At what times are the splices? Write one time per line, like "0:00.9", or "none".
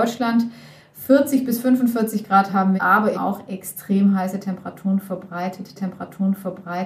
0:02.8
0:03.1
0:05.8